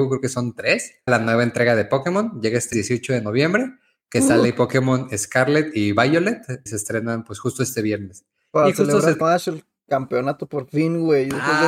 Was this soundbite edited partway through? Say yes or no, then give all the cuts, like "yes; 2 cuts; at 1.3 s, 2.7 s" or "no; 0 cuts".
yes; 4 cuts; at 1.1 s, 2.7 s, 6.7 s, 9.2 s